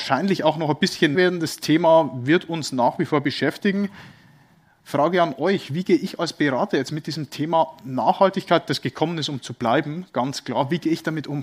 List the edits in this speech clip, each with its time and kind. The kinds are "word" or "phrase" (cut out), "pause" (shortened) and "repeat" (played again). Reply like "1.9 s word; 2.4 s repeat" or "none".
1.1 s word